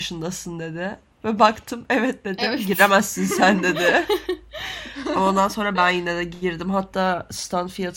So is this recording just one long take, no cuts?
yes; 0 cuts

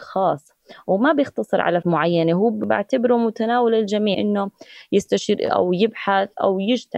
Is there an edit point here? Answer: yes; 3 cuts; at 1.8 s, 4.1 s, 5.5 s

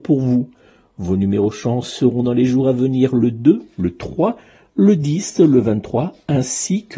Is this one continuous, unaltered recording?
yes; 0 cuts

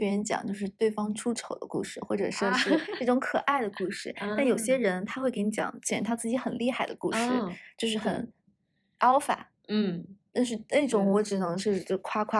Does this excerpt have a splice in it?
no; 0 cuts

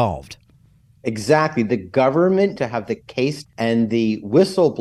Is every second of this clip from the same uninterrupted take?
no; 2 cuts; at 2.6 s, 3.4 s

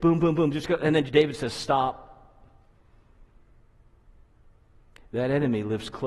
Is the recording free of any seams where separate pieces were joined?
no; 1 cut; at 1.1 s

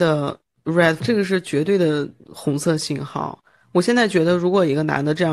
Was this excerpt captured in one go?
no; 1 cut; at 1.0 s

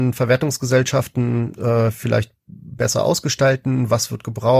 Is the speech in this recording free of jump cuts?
no; 1 cut; at 1.6 s

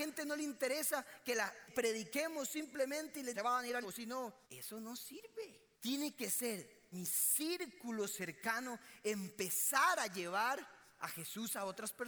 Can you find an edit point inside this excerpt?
yes; 6 cuts; at 1.7 s, 3.3 s, 3.8 s, 4.4 s, 5.7 s, 6.9 s

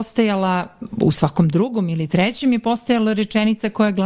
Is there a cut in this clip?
no; 0 cuts

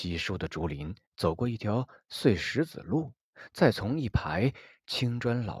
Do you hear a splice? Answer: yes; 1 cut; at 1.1 s

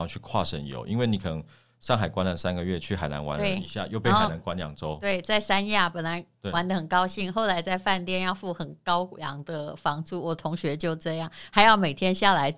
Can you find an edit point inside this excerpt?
no; 0 cuts

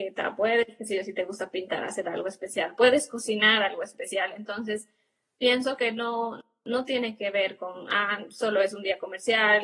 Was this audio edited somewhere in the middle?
no; 0 cuts

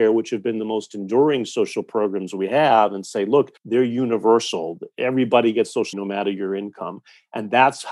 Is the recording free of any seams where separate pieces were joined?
no; 2 cuts; at 3.6 s, 5.9 s

